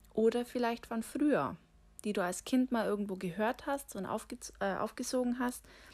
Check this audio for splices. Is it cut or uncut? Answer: uncut